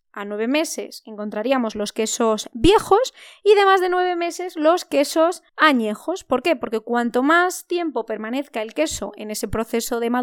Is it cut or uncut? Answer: cut